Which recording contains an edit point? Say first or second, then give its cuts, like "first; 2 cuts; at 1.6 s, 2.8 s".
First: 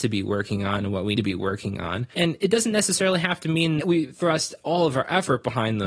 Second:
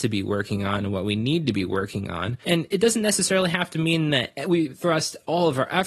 first; 2 cuts; at 1.2 s, 3.8 s